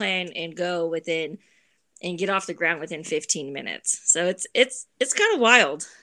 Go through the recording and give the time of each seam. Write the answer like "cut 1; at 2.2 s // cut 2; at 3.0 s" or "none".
none